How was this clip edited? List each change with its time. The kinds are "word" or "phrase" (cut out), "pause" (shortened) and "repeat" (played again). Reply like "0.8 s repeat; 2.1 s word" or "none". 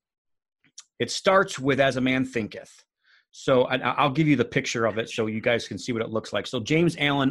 none